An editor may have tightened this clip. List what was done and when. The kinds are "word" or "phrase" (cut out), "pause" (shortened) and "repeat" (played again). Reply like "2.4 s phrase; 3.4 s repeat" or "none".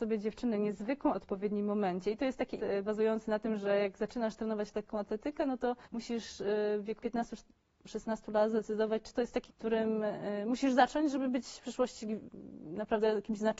1.1 s phrase; 2.6 s word; 5.8 s pause; 7.0 s word; 9.1 s phrase; 9.5 s phrase